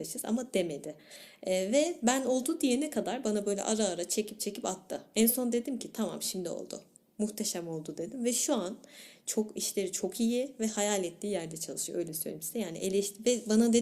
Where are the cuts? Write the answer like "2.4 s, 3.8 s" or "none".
none